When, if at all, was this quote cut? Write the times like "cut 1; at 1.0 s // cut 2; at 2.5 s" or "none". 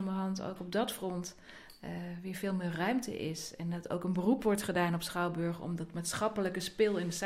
none